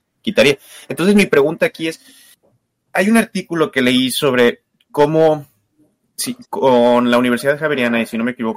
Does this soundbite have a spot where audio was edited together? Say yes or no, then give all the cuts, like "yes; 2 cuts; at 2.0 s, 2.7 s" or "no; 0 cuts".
yes; 2 cuts; at 2.3 s, 6.5 s